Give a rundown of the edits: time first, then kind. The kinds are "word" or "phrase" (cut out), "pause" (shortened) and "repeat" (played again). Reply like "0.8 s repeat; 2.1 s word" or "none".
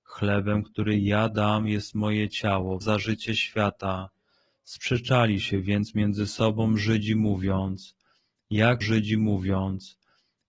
2.8 s word; 8.8 s repeat

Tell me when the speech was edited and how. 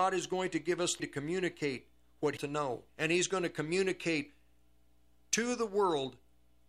1.0 s word; 2.4 s phrase; 2.9 s pause

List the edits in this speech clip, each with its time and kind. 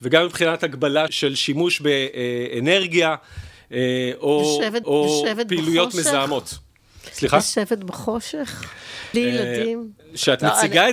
1.1 s word; 4.8 s repeat; 9.1 s word

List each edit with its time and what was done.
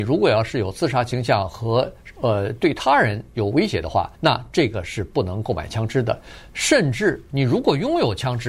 4.1 s pause

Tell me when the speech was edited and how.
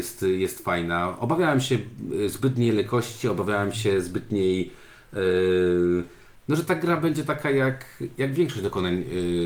none

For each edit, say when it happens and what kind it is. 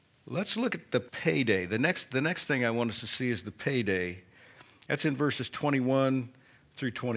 1.1 s pause

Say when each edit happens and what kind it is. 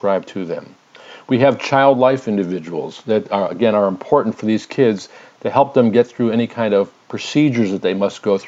7.0 s pause

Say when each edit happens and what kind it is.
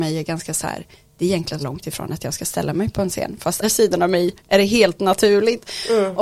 1.6 s word; 3.6 s word; 4.4 s pause

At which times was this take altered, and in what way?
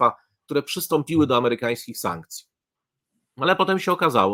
none

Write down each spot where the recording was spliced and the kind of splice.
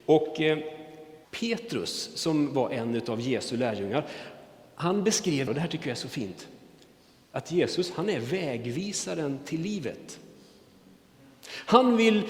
1.2 s pause; 5.5 s phrase

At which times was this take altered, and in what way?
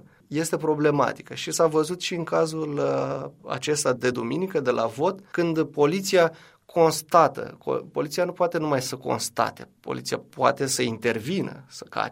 none

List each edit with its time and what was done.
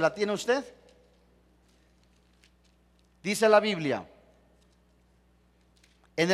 none

